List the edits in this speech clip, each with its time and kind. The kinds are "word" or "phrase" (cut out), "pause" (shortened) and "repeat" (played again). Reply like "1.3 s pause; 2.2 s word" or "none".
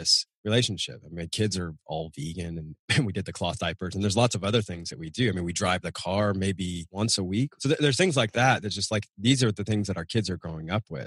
none